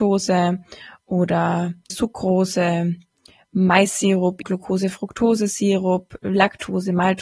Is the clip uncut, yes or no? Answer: no